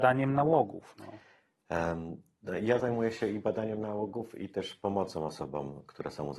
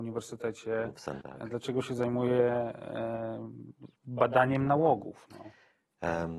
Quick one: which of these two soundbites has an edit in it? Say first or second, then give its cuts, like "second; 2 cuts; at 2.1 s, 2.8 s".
second; 2 cuts; at 1.2 s, 4.0 s